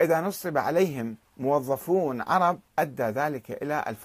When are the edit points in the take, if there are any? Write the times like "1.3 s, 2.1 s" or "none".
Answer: 1.3 s, 2.7 s